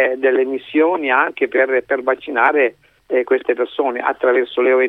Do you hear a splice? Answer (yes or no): no